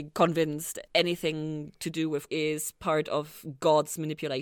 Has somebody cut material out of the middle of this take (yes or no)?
yes